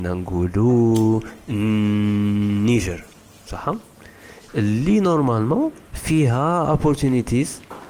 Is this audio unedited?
no; 1 cut; at 5.8 s

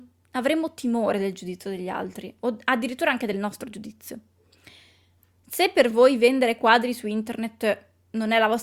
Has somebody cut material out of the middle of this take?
no; 0 cuts

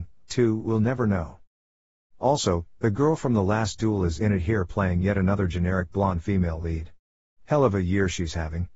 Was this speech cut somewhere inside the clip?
no; 0 cuts

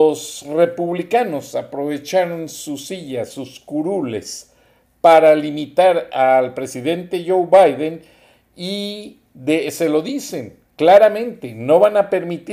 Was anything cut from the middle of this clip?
no; 0 cuts

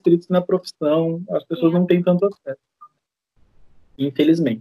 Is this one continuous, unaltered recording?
yes; 0 cuts

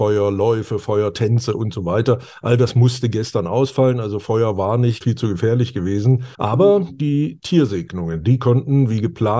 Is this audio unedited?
no; 2 cuts; at 5.0 s, 6.3 s

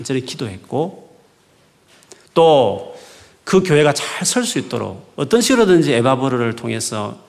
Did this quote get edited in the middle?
no; 0 cuts

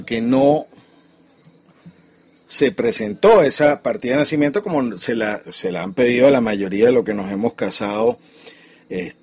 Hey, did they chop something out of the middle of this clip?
no; 0 cuts

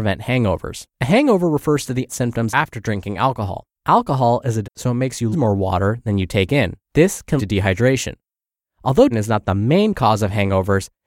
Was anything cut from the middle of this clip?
yes; 9 cuts; at 0.9 s, 2.1 s, 2.5 s, 3.7 s, 4.6 s, 5.3 s, 6.8 s, 7.4 s, 9.1 s

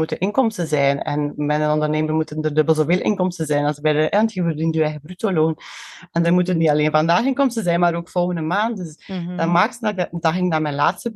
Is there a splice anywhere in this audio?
no; 0 cuts

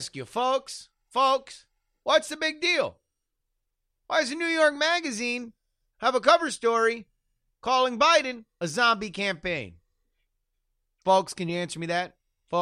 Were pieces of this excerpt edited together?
no; 0 cuts

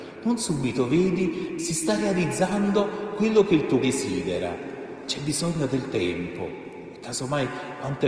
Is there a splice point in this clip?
yes; 2 cuts; at 1.6 s, 3.8 s

